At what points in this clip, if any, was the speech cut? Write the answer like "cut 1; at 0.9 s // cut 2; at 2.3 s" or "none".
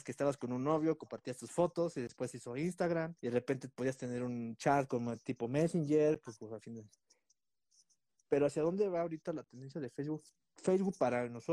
cut 1; at 3.2 s